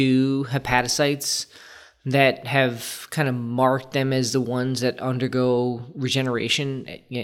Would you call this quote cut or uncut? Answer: uncut